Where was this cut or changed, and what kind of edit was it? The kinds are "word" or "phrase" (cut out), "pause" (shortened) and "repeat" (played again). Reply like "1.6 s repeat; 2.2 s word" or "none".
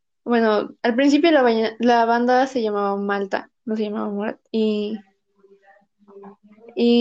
4.5 s pause